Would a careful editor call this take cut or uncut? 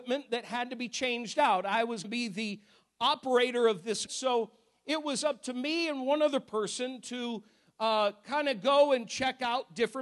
cut